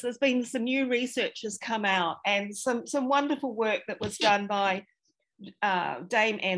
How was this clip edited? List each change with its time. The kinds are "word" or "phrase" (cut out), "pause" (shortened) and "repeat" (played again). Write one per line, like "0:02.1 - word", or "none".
none